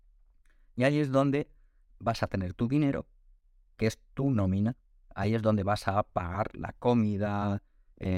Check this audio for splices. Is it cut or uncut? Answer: uncut